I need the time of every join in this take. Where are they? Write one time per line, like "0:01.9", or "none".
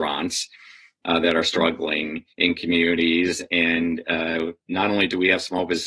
0:02.3
0:04.6